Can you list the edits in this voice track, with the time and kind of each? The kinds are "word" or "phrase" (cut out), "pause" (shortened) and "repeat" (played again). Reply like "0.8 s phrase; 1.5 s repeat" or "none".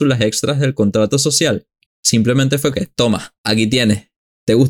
1.9 s pause; 2.7 s word; 3.4 s pause